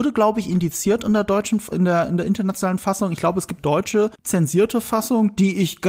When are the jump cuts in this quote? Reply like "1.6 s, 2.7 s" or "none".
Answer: 1.7 s, 3.6 s, 4.1 s